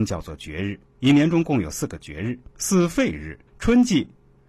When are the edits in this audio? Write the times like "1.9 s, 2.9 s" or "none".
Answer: 2.5 s, 3.5 s